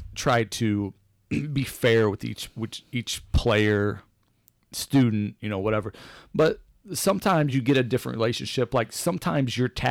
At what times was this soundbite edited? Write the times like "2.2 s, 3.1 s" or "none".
none